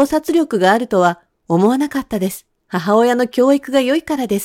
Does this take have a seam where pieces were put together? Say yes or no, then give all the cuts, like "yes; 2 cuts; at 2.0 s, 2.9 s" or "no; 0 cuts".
yes; 1 cut; at 2.6 s